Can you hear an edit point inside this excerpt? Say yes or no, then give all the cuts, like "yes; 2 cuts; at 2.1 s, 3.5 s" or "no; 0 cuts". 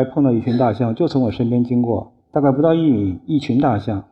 yes; 1 cut; at 2.2 s